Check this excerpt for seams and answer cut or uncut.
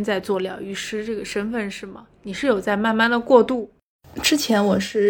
uncut